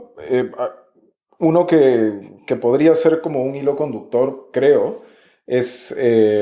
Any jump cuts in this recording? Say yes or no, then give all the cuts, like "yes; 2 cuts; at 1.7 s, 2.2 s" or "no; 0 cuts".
no; 0 cuts